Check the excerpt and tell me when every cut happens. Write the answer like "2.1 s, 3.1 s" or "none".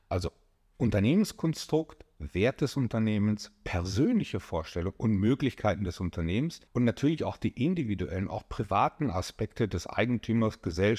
6.7 s